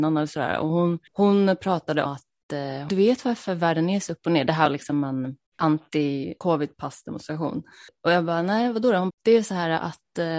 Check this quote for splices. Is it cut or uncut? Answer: cut